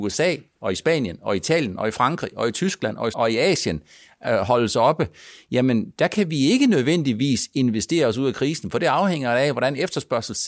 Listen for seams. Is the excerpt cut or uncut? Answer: cut